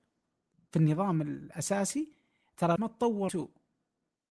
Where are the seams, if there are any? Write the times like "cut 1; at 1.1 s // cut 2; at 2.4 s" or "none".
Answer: cut 1; at 2.8 s // cut 2; at 3.3 s